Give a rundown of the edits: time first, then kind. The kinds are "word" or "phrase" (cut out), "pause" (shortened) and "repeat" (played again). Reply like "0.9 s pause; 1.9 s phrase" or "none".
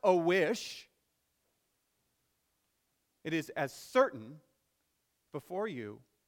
none